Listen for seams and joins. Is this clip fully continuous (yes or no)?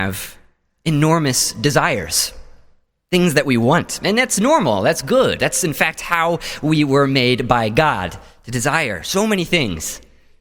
yes